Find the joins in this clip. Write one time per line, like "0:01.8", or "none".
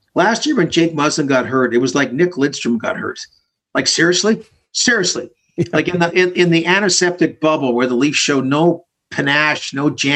none